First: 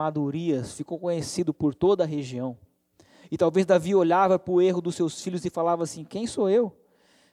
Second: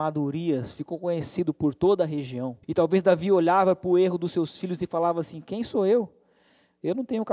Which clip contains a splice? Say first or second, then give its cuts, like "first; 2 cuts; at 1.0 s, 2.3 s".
second; 1 cut; at 2.6 s